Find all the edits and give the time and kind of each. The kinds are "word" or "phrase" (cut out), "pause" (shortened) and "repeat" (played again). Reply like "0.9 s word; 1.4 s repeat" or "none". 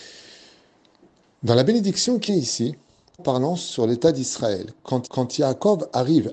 2.3 s phrase; 3.2 s phrase; 5.1 s repeat